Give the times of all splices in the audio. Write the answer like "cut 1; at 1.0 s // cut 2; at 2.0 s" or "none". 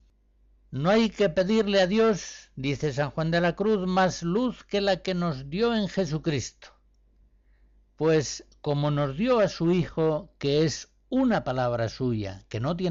none